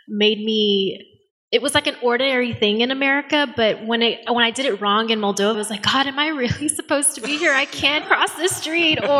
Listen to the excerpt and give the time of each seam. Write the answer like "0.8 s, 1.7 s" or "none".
1.3 s, 5.5 s, 8.0 s